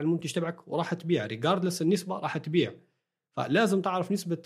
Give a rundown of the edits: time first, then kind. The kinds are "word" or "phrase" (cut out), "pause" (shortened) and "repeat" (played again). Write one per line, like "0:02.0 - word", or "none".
none